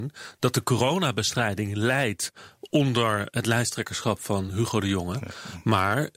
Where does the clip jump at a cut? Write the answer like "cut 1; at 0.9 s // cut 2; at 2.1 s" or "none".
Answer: none